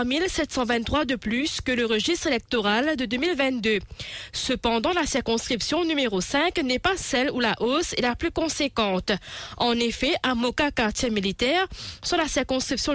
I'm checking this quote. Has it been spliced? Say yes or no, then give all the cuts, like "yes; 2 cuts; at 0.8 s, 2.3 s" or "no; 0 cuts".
no; 0 cuts